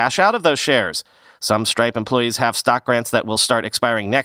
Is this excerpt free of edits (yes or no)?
yes